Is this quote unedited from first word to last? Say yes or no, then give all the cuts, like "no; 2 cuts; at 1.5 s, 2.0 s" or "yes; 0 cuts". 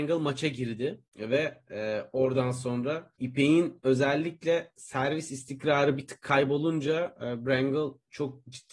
no; 2 cuts; at 1.1 s, 3.2 s